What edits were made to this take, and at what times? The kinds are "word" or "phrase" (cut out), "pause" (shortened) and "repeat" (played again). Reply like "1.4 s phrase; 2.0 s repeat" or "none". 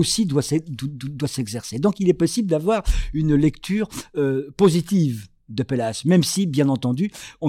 none